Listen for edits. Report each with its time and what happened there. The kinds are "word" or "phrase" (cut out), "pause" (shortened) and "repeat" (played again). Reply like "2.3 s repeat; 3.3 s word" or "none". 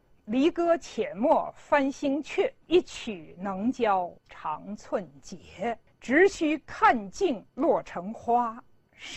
2.6 s pause; 4.2 s pause; 5.9 s pause; 7.5 s pause